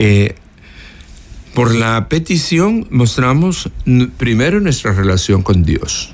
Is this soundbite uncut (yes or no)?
yes